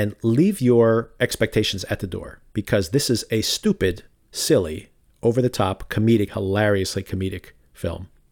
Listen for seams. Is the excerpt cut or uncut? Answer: cut